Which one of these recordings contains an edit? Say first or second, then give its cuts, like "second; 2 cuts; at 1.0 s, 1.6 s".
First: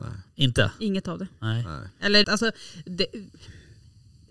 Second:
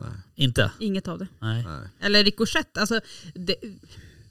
first; 1 cut; at 2.2 s